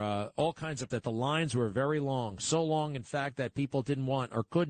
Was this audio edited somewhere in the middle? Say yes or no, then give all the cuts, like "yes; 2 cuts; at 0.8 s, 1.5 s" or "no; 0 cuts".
yes; 1 cut; at 0.9 s